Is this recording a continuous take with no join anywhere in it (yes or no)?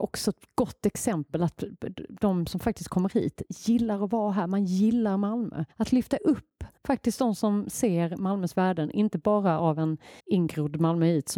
no